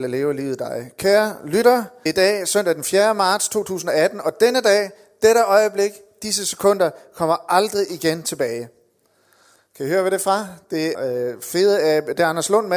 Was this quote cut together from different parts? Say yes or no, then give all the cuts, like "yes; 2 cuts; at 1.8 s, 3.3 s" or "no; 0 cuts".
yes; 2 cuts; at 2.1 s, 10.9 s